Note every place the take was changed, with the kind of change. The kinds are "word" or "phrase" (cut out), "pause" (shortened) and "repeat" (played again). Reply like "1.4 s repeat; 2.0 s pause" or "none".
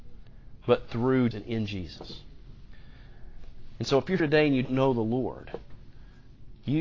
1.3 s word; 4.2 s word; 4.6 s word